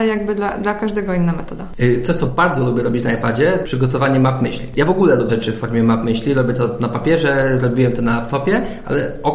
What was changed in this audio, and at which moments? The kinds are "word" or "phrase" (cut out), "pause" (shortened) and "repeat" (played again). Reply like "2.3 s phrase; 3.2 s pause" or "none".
3.6 s word; 5.3 s word